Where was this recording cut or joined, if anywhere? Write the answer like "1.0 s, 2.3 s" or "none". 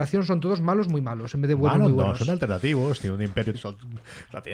3.5 s